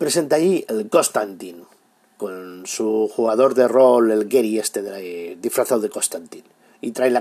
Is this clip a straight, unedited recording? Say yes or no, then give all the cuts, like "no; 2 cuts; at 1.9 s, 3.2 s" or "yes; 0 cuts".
yes; 0 cuts